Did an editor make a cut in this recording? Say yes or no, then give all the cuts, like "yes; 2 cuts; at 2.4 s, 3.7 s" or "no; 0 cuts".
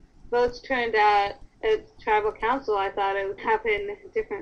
yes; 2 cuts; at 1.5 s, 3.4 s